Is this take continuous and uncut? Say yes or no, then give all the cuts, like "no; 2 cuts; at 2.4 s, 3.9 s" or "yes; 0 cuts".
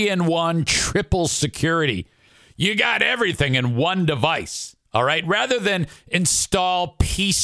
yes; 0 cuts